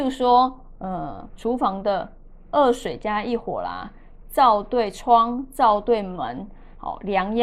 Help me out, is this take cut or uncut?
cut